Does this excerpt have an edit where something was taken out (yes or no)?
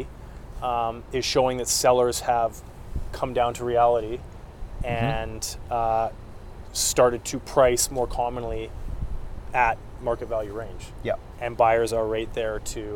no